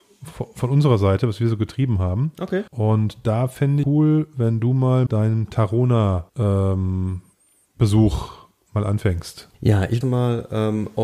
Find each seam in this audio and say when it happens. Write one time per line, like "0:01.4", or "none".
0:02.7
0:03.8
0:05.1
0:06.3
0:09.5
0:10.0

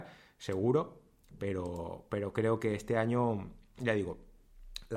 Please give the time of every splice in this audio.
none

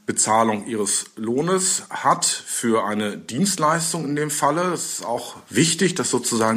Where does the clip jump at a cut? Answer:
none

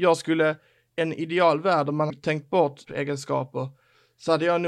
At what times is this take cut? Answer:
0:01.0
0:02.1
0:02.8

